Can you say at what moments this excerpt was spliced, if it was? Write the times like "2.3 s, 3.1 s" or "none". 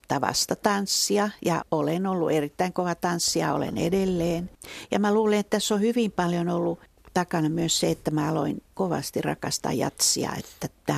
none